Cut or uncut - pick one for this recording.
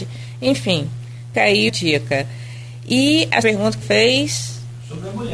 cut